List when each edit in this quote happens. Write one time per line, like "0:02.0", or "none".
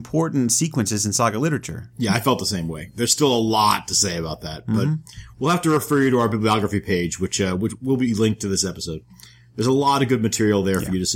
none

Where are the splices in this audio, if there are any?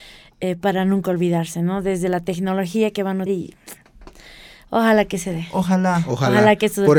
0:03.3

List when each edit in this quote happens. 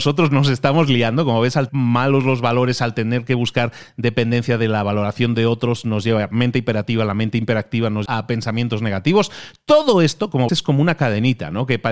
0:01.7
0:08.1
0:10.5

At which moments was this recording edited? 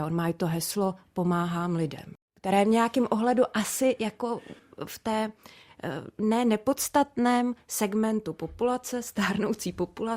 none

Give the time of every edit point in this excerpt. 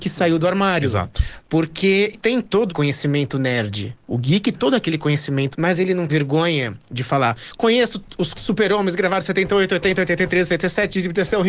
0:02.1
0:02.7
0:04.5
0:05.5
0:06.1
0:08.3

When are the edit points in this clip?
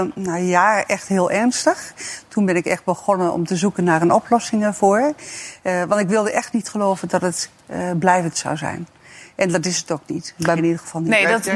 0:10.6

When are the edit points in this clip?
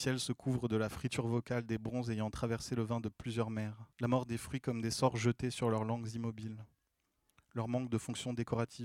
0:03.9

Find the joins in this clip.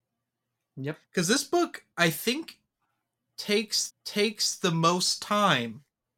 0:01.1
0:01.9
0:03.9

